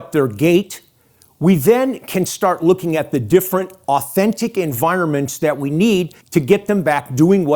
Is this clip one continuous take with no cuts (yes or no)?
no